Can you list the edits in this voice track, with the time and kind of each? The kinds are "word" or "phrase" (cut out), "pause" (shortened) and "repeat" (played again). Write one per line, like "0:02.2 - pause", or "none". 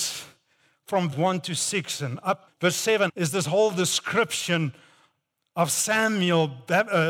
0:01.1 - word
0:02.5 - word
0:03.1 - word